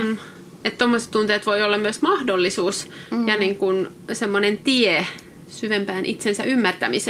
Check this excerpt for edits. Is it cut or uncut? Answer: uncut